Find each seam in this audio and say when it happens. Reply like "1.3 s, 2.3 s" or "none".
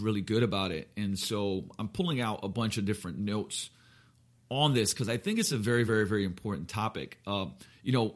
none